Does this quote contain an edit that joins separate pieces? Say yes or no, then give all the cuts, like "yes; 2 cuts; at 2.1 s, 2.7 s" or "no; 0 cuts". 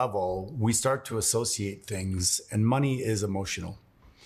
no; 0 cuts